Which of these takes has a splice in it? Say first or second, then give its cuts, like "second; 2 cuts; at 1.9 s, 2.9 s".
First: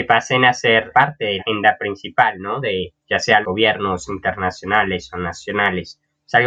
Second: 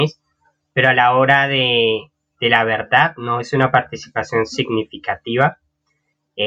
first; 5 cuts; at 0.9 s, 1.4 s, 3.0 s, 3.4 s, 4.1 s